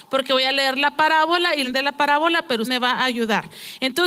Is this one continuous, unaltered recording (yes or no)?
no